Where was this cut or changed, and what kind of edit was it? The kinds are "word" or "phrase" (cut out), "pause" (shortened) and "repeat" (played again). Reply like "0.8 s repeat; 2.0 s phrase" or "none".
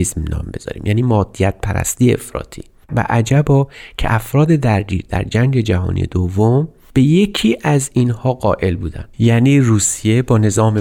none